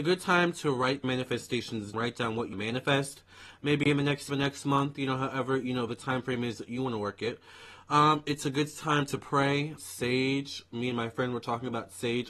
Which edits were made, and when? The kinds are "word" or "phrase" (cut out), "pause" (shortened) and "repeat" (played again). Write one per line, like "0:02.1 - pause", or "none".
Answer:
0:01.0 - word
0:01.9 - word
0:02.5 - word
0:04.3 - word
0:09.8 - word